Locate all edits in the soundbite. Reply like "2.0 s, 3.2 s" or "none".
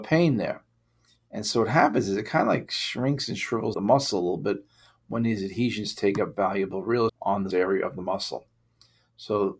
3.7 s, 7.1 s, 7.5 s